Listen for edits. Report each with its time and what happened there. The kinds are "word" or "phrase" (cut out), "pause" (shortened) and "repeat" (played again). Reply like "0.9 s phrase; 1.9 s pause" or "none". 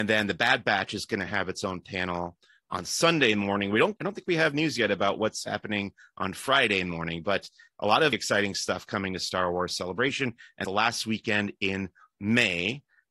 4.0 s word; 8.1 s word; 10.6 s phrase